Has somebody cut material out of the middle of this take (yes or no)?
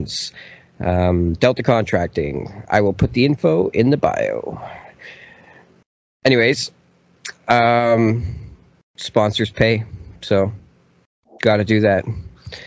no